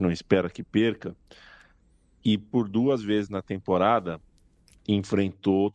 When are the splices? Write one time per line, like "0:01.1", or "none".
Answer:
none

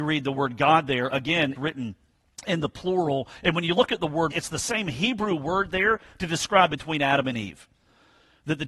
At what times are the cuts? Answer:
0:01.6
0:04.3
0:06.7

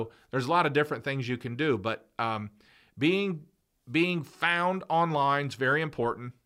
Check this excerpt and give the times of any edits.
none

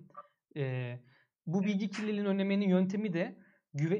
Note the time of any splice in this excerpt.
none

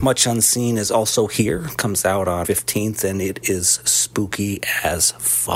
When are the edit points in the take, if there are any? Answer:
0:02.4

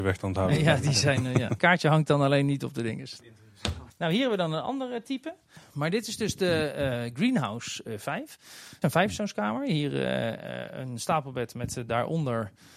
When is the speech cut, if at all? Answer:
0:01.6
0:08.8

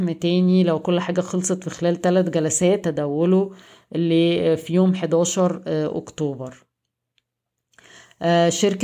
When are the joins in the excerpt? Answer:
0:02.8

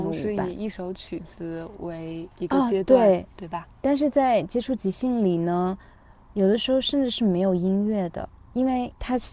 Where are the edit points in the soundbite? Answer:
none

